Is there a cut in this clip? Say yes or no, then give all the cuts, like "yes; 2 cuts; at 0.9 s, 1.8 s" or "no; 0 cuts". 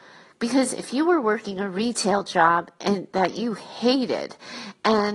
no; 0 cuts